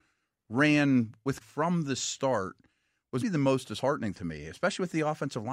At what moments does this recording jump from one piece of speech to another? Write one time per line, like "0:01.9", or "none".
0:01.4
0:03.2
0:04.1